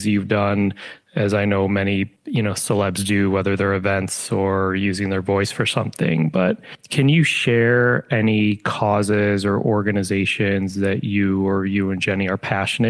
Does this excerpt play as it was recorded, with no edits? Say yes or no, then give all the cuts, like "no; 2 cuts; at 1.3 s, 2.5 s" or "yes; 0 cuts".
no; 1 cut; at 2.2 s